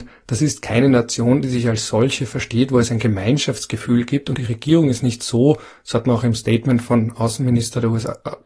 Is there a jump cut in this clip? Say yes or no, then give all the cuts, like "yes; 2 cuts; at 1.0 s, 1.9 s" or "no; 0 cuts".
yes; 1 cut; at 4.3 s